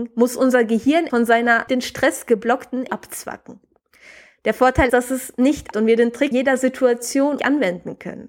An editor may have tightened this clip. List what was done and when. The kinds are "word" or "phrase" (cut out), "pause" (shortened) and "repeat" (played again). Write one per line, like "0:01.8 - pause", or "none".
0:01.1 - word
0:01.7 - word
0:02.9 - word
0:04.9 - word
0:05.7 - word
0:06.3 - word
0:07.4 - word